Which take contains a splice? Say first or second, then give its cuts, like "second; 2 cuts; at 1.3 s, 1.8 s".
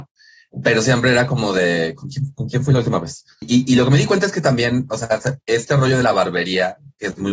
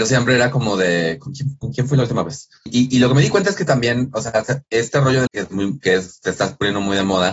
second; 1 cut; at 5.3 s